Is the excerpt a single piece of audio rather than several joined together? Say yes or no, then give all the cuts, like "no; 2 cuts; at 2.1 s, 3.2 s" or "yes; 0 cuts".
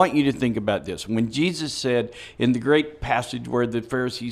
yes; 0 cuts